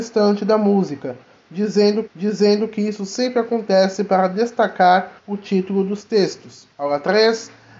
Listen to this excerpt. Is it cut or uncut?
cut